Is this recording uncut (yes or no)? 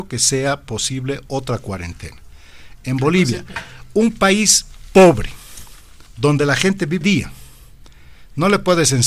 no